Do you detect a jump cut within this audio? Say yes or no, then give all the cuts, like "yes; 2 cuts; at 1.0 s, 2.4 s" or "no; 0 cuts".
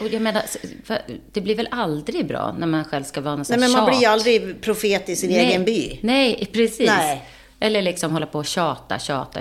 no; 0 cuts